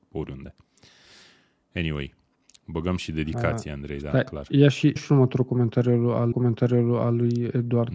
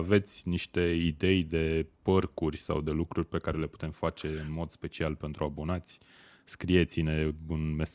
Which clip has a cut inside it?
first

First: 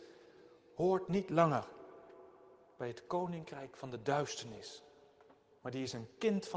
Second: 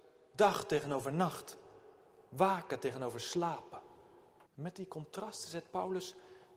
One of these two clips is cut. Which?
second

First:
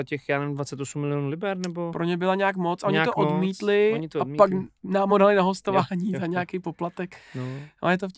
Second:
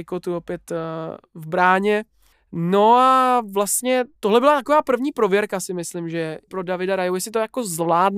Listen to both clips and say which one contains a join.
second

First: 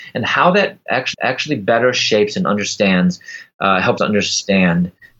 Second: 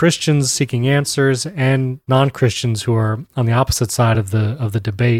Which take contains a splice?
first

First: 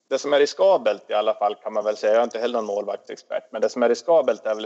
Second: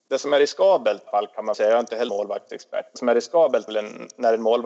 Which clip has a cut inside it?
second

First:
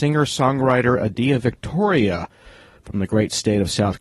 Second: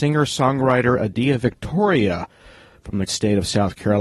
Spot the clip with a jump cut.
second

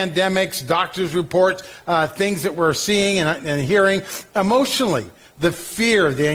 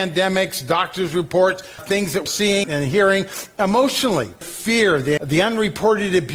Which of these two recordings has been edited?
second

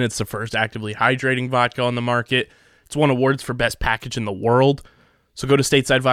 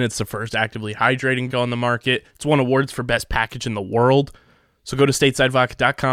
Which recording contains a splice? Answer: second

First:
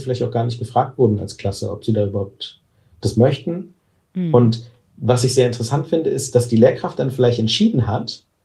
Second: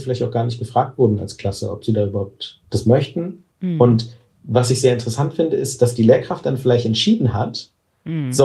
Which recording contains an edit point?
second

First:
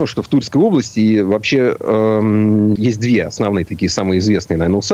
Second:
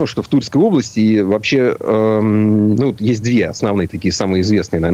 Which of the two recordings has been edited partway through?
first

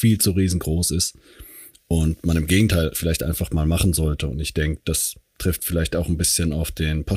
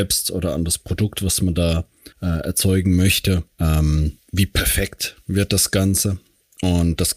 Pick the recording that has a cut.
second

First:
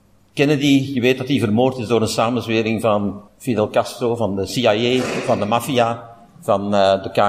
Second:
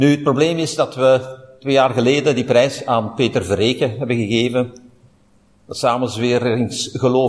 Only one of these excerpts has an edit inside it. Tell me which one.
first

